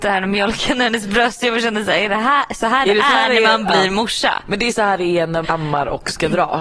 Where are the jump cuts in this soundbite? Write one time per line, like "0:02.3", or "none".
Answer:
0:05.4